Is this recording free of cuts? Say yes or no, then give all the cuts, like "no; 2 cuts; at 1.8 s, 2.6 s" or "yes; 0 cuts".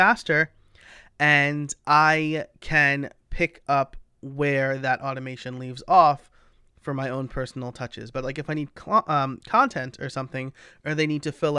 yes; 0 cuts